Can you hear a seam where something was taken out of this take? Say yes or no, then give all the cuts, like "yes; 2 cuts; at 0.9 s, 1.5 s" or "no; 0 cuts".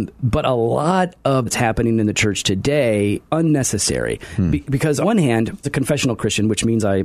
yes; 4 cuts; at 1.5 s, 3.3 s, 5.0 s, 5.6 s